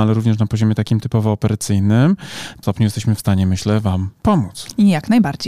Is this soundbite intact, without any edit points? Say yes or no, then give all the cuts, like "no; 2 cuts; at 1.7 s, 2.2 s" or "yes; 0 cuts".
no; 1 cut; at 2.6 s